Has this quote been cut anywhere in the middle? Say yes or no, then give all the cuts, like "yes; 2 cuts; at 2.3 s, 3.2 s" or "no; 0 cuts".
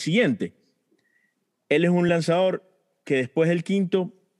no; 0 cuts